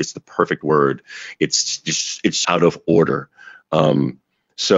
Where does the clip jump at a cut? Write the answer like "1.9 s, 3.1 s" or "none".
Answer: 2.4 s